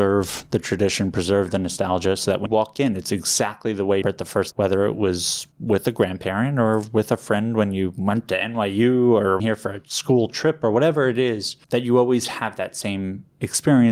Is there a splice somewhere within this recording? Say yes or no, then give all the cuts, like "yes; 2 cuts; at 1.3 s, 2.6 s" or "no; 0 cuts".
yes; 6 cuts; at 2.5 s, 4.0 s, 4.5 s, 5.5 s, 9.4 s, 11.6 s